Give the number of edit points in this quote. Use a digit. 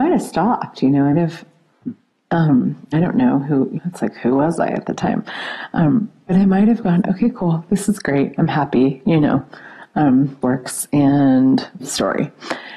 6